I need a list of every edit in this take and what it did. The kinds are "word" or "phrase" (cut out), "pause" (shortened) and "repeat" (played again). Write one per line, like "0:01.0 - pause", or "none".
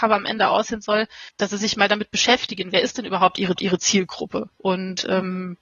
0:01.3 - pause
0:03.6 - repeat